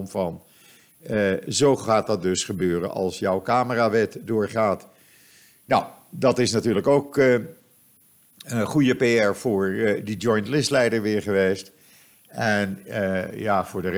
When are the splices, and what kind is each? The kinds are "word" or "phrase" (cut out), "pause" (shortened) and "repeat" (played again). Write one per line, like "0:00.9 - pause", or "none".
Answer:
none